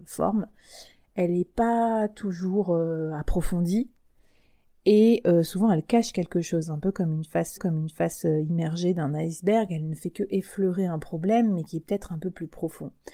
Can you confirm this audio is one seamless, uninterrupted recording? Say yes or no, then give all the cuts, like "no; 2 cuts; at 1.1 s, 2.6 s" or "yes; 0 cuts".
no; 1 cut; at 7.6 s